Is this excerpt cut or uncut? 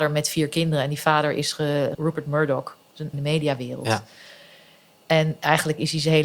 cut